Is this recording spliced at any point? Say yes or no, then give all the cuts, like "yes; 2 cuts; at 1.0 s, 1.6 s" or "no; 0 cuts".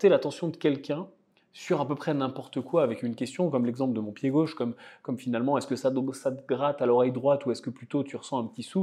no; 0 cuts